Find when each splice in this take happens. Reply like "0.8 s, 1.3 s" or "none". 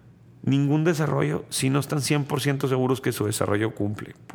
none

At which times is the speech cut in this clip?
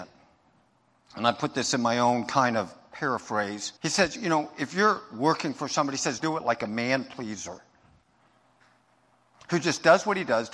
3.8 s, 6.2 s

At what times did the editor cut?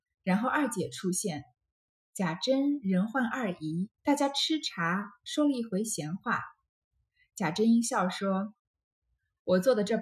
3.9 s

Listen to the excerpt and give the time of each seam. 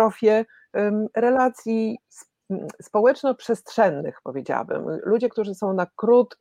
none

